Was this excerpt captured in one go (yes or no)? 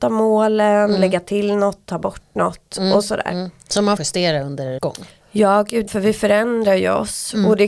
no